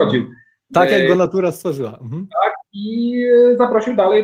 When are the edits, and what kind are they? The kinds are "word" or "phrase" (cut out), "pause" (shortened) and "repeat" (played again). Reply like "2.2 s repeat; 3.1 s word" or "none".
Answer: 2.7 s pause